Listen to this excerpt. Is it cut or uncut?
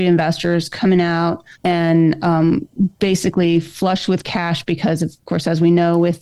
cut